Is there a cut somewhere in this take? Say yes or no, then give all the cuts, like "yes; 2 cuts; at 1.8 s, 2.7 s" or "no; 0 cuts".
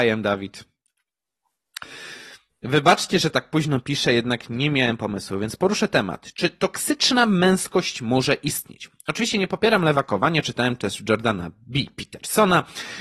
no; 0 cuts